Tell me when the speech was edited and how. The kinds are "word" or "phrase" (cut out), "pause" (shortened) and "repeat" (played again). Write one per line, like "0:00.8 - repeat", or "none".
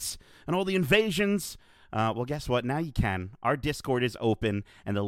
none